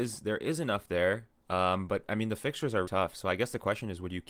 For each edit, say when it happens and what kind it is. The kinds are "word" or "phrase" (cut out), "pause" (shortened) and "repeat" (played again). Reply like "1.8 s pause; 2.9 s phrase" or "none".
2.8 s word